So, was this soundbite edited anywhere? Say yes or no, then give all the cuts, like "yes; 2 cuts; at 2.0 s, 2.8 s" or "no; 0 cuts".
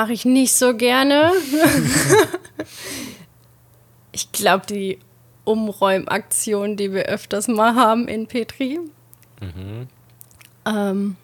no; 0 cuts